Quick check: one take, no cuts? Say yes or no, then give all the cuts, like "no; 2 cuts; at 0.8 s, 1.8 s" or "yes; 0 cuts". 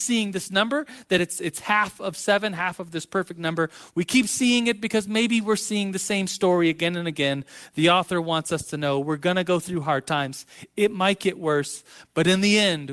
yes; 0 cuts